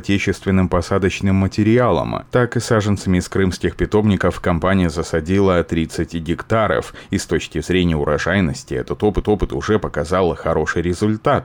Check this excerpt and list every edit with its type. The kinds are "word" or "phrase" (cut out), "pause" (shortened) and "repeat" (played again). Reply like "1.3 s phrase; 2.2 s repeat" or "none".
9.2 s repeat